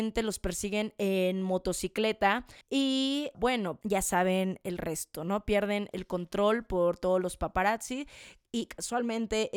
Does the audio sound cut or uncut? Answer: cut